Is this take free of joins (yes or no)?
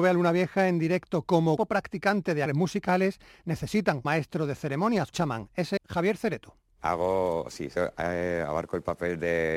no